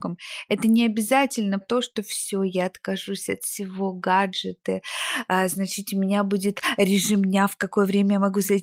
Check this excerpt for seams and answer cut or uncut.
cut